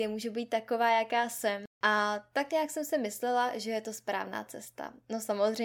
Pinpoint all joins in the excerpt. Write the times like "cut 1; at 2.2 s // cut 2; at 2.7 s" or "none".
cut 1; at 1.7 s